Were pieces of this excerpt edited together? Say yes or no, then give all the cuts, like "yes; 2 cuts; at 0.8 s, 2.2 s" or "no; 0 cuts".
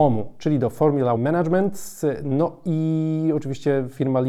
yes; 1 cut; at 1.2 s